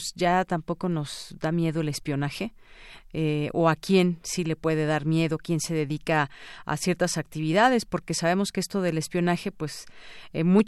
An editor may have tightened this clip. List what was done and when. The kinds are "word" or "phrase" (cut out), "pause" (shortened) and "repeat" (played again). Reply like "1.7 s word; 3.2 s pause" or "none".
none